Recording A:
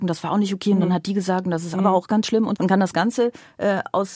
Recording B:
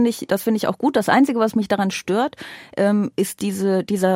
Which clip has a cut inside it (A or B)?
A